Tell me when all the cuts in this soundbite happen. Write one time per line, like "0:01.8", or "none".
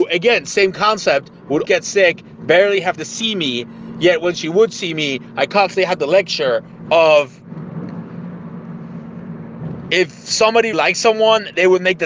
0:01.6
0:03.0
0:06.0
0:10.7